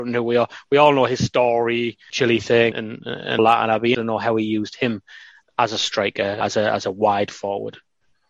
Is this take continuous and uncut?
no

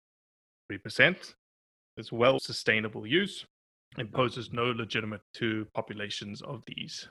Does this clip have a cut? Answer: yes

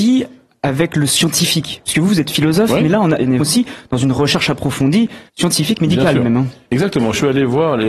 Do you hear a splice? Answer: yes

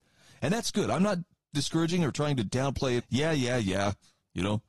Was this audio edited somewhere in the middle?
yes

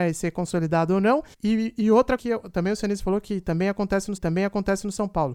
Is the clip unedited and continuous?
no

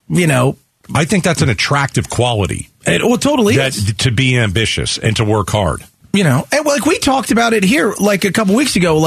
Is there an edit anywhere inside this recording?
no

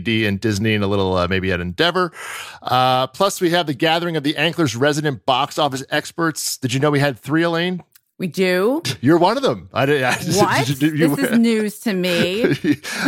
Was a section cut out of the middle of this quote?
no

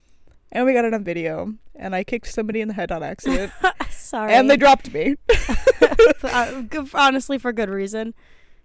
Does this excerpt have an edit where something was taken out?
no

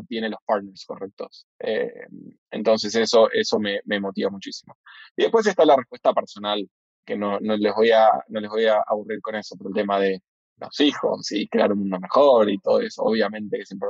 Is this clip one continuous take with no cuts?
yes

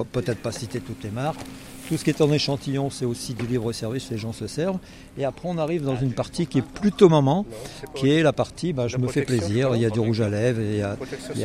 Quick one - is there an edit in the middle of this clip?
no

